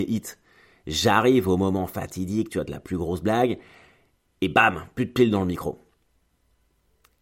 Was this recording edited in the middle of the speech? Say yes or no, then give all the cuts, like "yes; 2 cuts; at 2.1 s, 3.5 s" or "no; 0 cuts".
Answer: no; 0 cuts